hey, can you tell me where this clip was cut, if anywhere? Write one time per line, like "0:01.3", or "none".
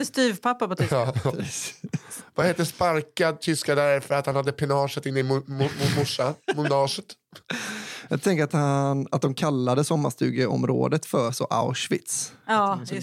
none